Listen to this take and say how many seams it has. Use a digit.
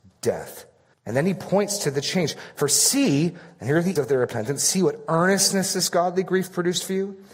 2